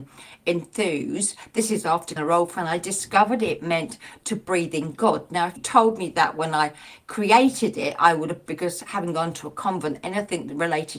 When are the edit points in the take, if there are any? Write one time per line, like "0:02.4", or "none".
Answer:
0:02.2
0:02.5
0:05.6
0:08.5